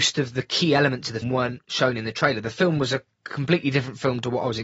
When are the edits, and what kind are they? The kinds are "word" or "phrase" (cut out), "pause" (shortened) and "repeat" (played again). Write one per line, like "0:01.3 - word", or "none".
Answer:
0:01.2 - word